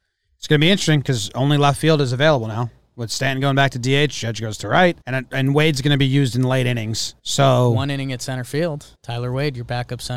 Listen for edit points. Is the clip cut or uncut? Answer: cut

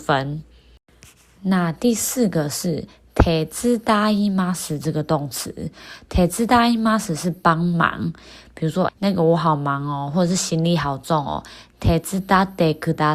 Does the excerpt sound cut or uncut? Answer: cut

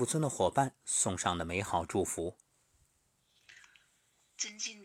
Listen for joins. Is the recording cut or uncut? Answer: uncut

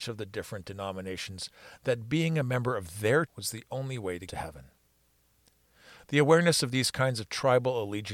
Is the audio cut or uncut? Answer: cut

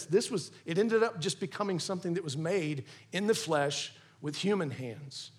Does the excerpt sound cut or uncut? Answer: uncut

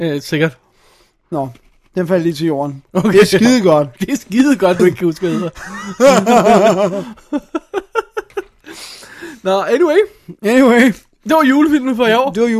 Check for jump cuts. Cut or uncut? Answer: cut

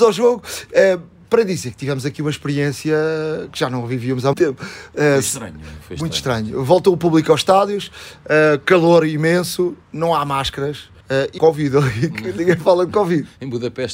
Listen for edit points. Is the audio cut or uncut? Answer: cut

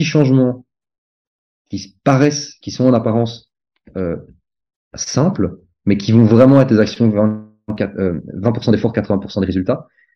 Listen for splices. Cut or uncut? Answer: uncut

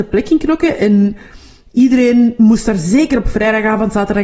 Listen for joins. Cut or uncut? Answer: uncut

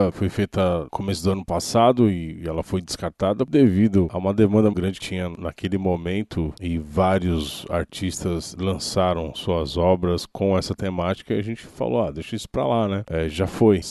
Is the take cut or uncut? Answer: cut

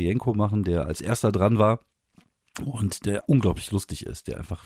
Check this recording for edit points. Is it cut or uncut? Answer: cut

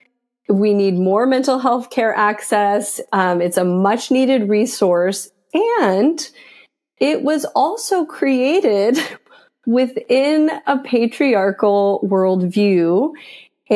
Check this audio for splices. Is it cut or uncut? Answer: uncut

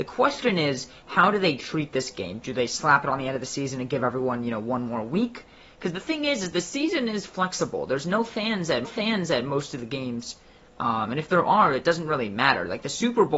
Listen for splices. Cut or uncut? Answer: cut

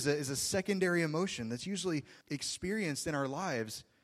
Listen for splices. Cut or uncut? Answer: cut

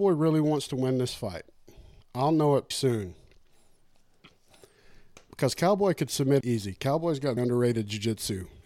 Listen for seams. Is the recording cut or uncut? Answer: cut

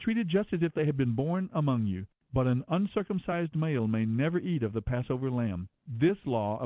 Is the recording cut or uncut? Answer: uncut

